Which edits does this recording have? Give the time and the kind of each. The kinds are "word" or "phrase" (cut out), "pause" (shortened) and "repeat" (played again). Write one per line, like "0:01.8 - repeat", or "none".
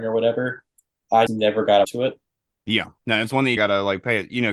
0:01.3 - word
0:01.8 - word
0:03.0 - pause
0:03.6 - word